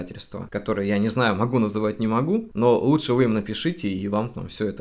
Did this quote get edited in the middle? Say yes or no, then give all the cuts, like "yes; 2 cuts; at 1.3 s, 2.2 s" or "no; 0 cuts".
no; 0 cuts